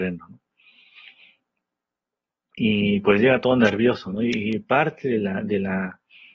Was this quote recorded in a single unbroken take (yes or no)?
yes